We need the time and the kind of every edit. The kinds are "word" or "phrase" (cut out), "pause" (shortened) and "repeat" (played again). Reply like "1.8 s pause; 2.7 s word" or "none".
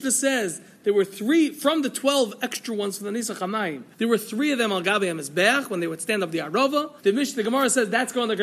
3.9 s pause; 7.0 s pause